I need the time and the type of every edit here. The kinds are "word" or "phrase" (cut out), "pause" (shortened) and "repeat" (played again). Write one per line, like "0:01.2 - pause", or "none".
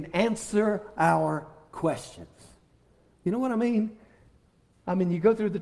none